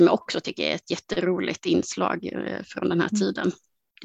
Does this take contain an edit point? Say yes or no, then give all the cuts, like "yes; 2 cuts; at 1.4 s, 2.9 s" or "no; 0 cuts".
no; 0 cuts